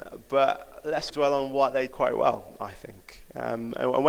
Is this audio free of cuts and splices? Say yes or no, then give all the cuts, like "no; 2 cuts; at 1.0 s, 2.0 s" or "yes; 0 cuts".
no; 2 cuts; at 1.1 s, 1.9 s